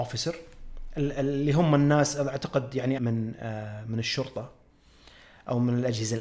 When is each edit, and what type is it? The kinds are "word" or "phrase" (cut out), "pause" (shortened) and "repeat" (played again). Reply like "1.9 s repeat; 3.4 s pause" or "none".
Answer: 3.0 s phrase